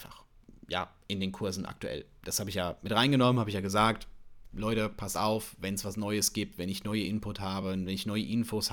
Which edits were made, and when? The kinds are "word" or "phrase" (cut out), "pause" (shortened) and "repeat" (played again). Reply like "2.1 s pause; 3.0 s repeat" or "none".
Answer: none